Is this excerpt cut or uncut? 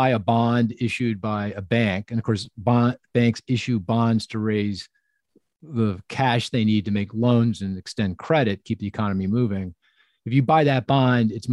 uncut